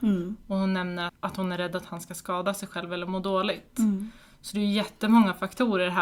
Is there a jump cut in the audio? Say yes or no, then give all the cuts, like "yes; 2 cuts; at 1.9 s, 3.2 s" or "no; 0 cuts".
yes; 1 cut; at 1.1 s